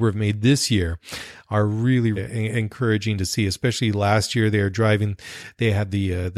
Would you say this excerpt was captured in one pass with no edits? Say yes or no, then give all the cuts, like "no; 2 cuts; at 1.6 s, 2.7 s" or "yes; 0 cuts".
no; 1 cut; at 2.2 s